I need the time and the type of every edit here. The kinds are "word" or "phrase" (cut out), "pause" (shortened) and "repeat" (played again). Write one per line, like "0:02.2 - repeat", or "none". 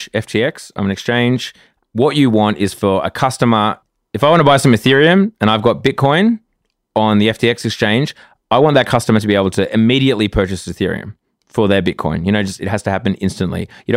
none